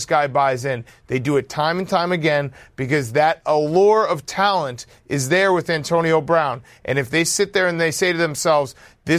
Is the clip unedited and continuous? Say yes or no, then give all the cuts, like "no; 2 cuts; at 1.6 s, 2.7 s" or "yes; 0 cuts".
yes; 0 cuts